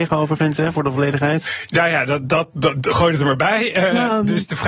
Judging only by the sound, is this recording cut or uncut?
uncut